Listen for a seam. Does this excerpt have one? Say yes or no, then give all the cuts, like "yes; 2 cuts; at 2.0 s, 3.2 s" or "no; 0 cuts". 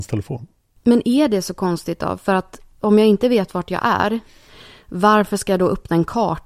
no; 0 cuts